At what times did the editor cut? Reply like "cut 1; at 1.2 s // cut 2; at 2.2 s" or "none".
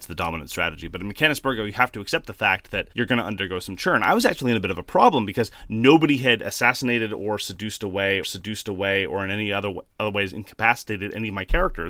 cut 1; at 2.9 s // cut 2; at 8.2 s // cut 3; at 9.9 s